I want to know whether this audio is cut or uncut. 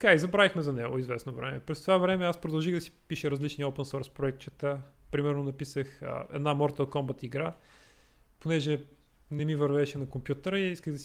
uncut